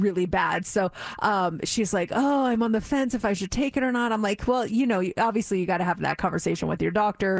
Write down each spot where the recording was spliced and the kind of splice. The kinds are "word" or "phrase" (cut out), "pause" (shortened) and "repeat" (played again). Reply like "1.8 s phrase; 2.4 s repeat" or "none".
none